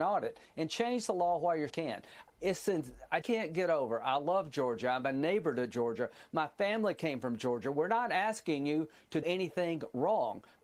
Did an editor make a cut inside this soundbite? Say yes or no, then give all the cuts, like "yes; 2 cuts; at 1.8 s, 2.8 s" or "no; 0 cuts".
yes; 3 cuts; at 1.7 s, 3.2 s, 9.2 s